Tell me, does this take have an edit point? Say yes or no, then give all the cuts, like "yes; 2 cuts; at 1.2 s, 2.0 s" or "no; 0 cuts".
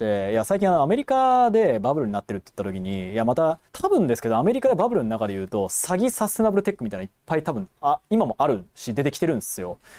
yes; 1 cut; at 3.7 s